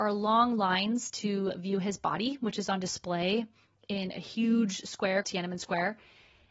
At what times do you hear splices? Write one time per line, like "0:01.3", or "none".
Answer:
0:05.2